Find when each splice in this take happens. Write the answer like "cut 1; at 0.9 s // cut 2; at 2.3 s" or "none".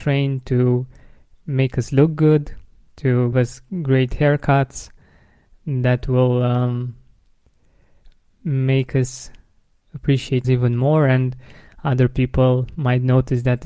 cut 1; at 3.3 s // cut 2; at 10.4 s